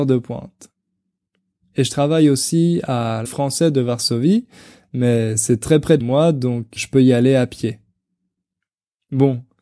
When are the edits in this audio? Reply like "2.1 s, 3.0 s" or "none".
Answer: 3.3 s, 6.0 s, 6.8 s